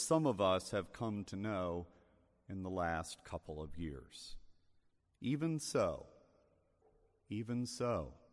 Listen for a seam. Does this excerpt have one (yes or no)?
no